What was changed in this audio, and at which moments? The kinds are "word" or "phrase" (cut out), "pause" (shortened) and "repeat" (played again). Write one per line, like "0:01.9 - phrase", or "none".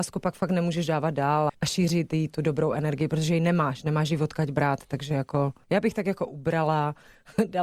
0:01.5 - word